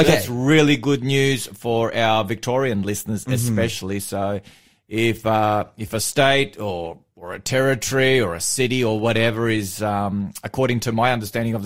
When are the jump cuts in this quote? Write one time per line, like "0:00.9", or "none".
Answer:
none